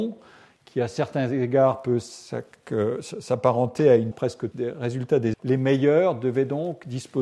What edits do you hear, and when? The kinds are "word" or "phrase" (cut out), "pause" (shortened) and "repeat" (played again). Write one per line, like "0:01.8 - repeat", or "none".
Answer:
0:04.1 - word
0:04.5 - word
0:05.3 - word

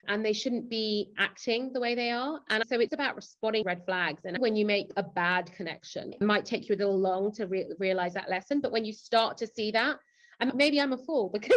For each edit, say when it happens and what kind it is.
0:02.9 - word
0:03.6 - word
0:06.1 - word

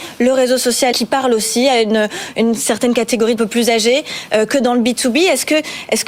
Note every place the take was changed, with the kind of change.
0:00.9 - word
0:03.4 - phrase

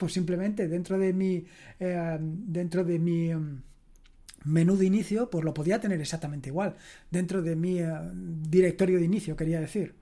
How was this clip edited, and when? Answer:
none

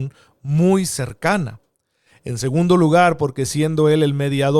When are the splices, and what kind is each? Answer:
none

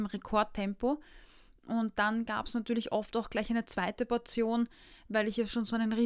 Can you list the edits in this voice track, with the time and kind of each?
none

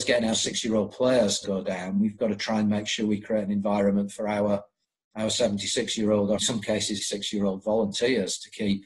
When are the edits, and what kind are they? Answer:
0:01.4 - word
0:06.4 - word
0:07.0 - word

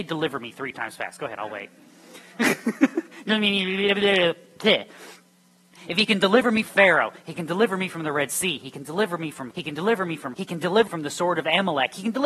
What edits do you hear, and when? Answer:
0:06.6 - word
0:09.5 - word
0:10.3 - word
0:10.9 - word

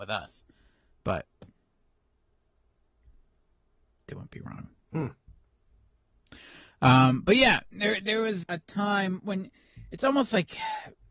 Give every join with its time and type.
0:08.4 - word

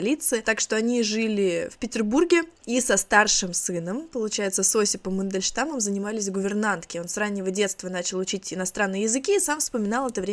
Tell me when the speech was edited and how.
none

